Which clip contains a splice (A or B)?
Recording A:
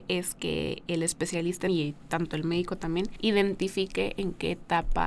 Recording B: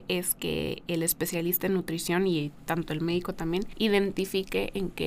A